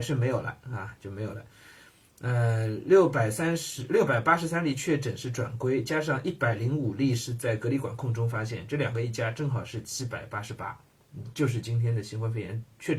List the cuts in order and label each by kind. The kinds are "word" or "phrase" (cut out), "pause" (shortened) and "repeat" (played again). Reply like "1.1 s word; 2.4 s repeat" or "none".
none